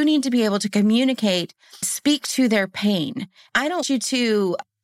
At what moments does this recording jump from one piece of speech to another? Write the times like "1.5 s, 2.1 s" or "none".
1.8 s, 3.8 s